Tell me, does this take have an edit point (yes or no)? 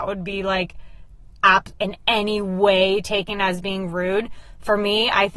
yes